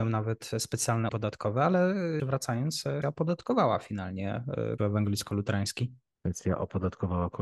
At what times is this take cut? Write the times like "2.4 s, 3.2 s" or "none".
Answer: 1.1 s, 2.2 s, 3.0 s, 4.8 s

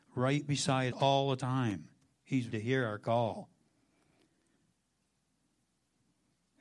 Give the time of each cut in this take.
0.9 s, 2.5 s

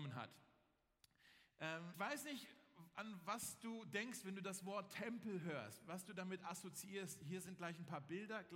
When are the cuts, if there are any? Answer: 1.9 s

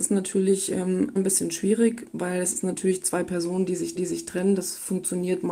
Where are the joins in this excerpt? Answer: 1.2 s, 4.0 s

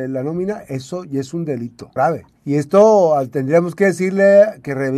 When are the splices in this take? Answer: 2.0 s, 2.4 s

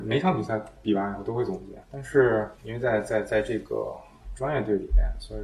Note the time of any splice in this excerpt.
1.8 s, 2.5 s

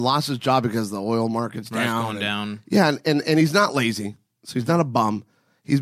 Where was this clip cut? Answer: none

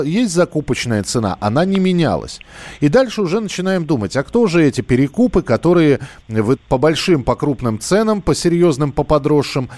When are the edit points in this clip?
6.6 s

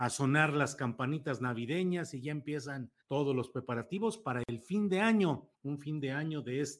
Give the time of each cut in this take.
3.0 s, 5.5 s

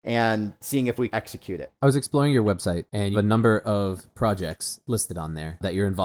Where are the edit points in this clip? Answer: 1.1 s, 1.8 s, 3.1 s

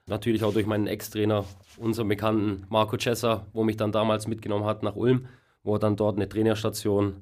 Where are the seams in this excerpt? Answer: none

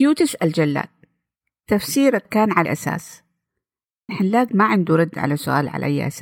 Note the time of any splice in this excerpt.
2.3 s, 2.7 s, 4.1 s, 4.5 s

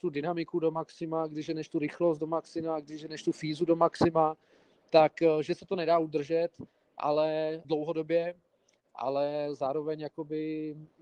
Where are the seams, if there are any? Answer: 7.6 s

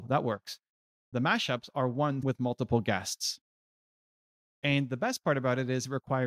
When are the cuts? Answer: 2.2 s

